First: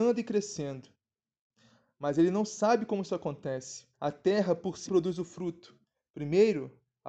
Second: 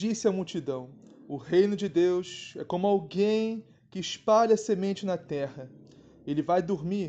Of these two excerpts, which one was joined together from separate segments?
first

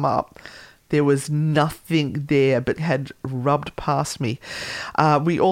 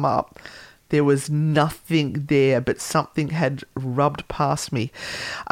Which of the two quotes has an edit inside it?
first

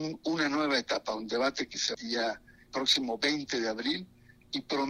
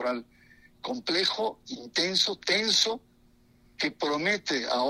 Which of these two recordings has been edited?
first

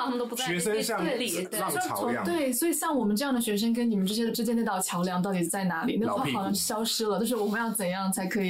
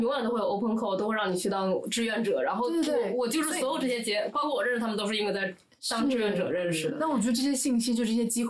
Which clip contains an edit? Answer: first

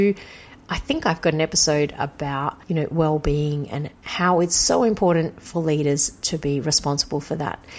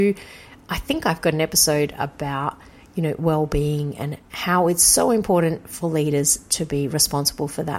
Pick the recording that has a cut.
first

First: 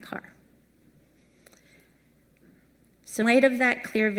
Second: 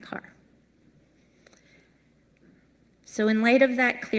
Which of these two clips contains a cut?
first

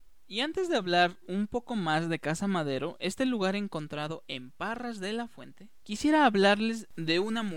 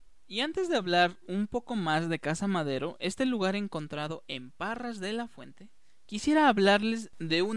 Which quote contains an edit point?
first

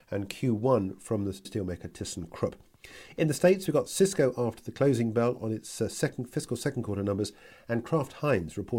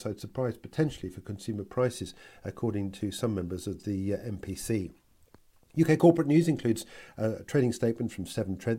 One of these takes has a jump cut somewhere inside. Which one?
first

